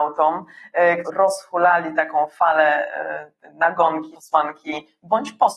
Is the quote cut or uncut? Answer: cut